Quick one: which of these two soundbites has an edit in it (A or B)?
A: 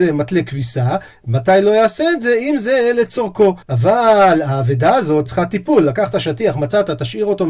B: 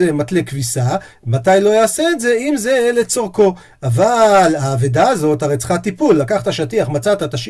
A